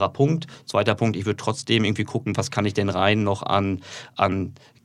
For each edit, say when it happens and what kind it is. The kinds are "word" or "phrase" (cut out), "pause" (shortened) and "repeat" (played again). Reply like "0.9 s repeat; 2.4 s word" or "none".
none